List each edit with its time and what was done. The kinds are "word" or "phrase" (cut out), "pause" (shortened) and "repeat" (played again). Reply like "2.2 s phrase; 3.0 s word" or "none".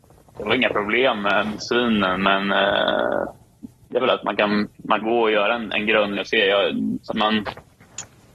1.6 s word; 4.0 s word; 5.0 s word; 6.2 s word; 7.1 s word

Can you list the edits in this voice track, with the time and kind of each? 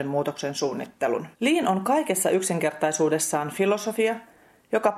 1.3 s pause

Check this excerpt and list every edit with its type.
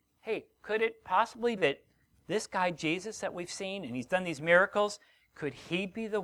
1.6 s word

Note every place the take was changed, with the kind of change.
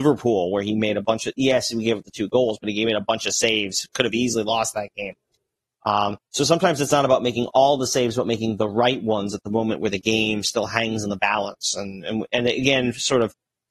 none

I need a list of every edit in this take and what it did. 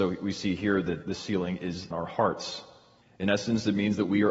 1.0 s word; 1.9 s phrase; 3.0 s pause

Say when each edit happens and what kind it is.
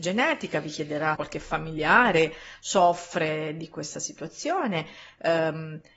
1.2 s word

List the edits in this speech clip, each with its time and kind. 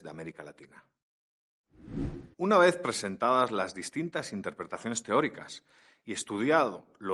2.3 s pause

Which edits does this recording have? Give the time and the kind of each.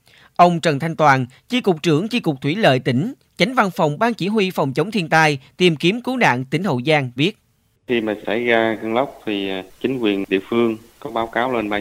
7.2 s word

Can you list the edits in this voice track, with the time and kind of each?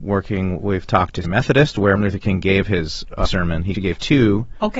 1.2 s word; 2.0 s word; 3.3 s word; 3.7 s word

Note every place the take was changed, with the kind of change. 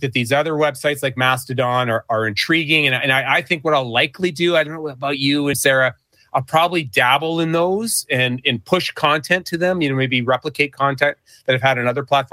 5.5 s phrase

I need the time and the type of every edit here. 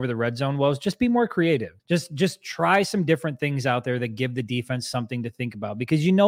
1.8 s pause

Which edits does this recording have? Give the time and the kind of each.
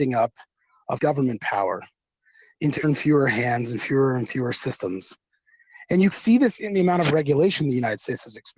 1.0 s word; 2.8 s word; 6.1 s word

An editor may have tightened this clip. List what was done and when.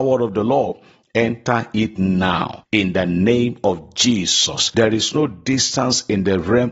none

